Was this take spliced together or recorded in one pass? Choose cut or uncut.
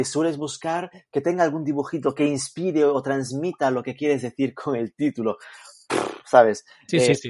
uncut